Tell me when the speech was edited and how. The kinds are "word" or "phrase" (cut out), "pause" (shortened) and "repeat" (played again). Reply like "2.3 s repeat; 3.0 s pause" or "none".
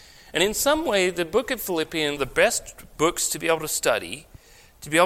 2.2 s phrase